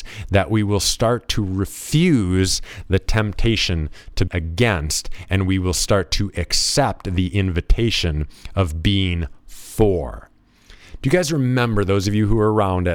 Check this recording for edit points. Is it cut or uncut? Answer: cut